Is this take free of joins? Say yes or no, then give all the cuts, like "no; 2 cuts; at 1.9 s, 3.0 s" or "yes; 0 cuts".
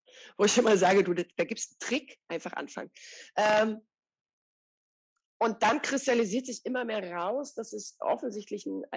no; 1 cut; at 2.2 s